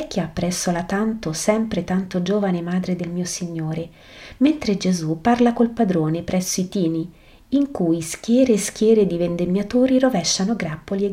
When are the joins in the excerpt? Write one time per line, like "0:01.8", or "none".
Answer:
none